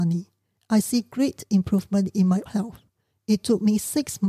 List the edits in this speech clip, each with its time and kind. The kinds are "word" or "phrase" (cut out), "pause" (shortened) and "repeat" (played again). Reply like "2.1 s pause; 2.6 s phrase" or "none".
2.5 s word